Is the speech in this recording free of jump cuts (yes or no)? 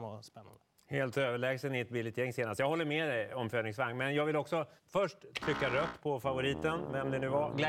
no